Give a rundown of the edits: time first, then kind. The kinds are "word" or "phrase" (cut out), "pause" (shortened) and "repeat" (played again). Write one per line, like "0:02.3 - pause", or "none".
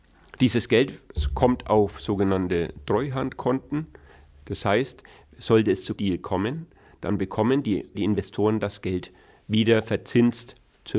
0:06.0 - word
0:07.9 - word